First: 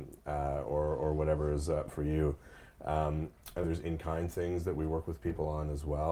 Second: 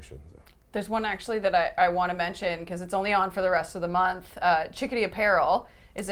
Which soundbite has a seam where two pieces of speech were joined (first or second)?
first